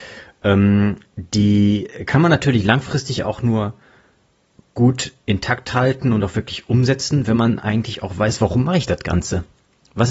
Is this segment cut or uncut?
uncut